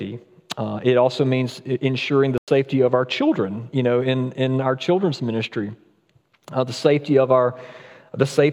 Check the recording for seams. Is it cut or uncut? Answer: uncut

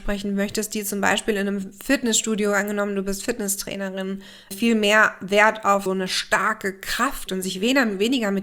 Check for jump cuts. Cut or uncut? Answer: cut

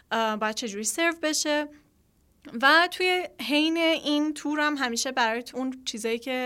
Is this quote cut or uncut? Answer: cut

